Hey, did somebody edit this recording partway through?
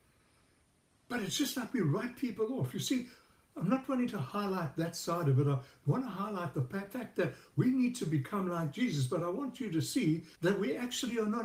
yes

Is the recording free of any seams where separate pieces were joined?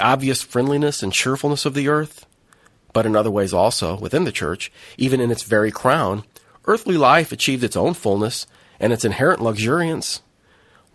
yes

